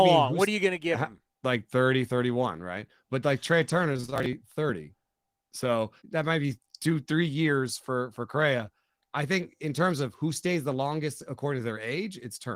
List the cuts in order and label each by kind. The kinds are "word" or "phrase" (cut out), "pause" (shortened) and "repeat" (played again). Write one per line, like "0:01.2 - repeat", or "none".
0:01.3 - pause
0:06.0 - pause